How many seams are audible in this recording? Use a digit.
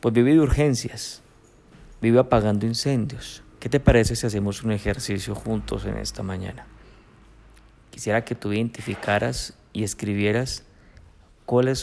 1